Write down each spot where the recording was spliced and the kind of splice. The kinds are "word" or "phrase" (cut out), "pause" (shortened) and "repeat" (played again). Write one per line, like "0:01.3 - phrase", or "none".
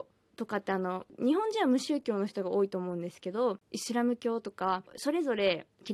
0:03.6 - pause